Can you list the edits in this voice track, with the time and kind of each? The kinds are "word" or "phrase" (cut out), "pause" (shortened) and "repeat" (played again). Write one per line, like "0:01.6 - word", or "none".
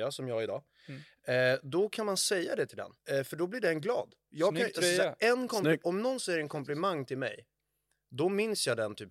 0:03.0 - pause